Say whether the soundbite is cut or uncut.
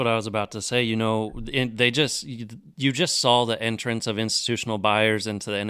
uncut